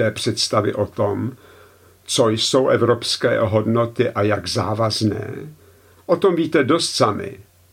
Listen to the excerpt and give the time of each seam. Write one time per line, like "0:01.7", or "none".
none